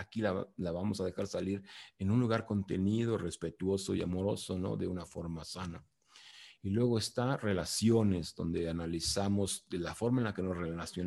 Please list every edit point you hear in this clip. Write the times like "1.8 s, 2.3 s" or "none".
none